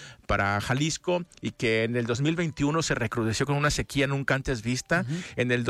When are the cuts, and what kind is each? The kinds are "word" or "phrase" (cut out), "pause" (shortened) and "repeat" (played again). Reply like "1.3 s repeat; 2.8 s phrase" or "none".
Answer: none